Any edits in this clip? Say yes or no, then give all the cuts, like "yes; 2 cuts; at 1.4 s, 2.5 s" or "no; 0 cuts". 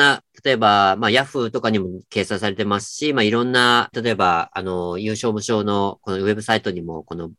yes; 1 cut; at 3.9 s